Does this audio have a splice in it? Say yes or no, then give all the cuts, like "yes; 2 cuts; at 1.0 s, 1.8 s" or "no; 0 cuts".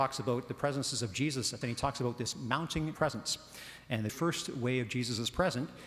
yes; 3 cuts; at 1.6 s, 2.9 s, 4.1 s